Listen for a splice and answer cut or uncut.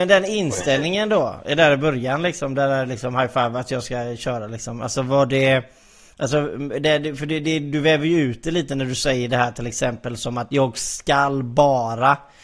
uncut